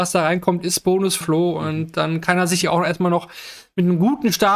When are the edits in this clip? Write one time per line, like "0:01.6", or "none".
0:01.2
0:02.6